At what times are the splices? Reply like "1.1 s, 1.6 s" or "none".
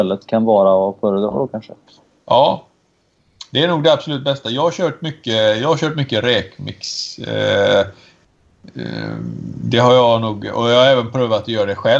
none